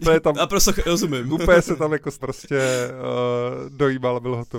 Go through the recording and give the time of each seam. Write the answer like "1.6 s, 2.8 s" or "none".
2.2 s